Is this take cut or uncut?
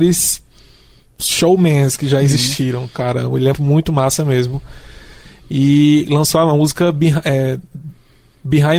cut